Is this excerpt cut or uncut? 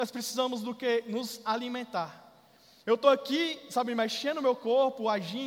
uncut